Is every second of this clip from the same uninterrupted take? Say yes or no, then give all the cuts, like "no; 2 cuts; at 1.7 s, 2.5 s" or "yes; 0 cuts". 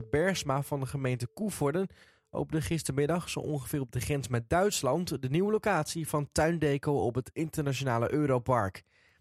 yes; 0 cuts